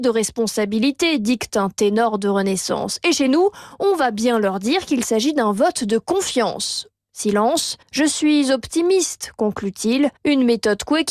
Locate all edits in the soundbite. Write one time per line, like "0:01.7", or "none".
0:07.8
0:10.2